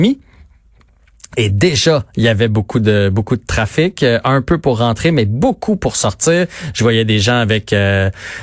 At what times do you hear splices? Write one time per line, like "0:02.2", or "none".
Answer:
none